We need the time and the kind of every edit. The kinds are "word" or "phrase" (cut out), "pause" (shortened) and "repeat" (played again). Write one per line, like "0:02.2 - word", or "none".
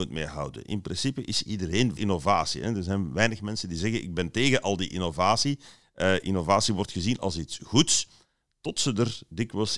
0:02.0 - word